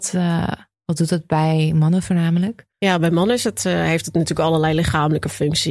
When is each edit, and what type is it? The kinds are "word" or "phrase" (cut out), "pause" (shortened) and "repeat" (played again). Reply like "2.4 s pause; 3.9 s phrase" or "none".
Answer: 2.7 s pause